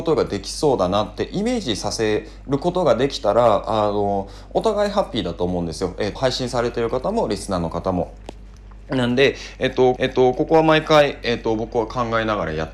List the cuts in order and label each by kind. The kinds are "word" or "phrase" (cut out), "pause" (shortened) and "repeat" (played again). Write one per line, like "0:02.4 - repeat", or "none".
0:06.2 - word
0:10.0 - repeat